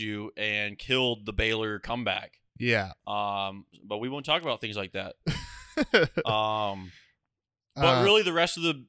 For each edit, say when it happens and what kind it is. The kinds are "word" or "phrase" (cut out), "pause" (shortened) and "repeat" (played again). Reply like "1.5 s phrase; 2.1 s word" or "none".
2.5 s pause